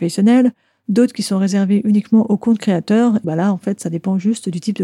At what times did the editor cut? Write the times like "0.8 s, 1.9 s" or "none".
3.2 s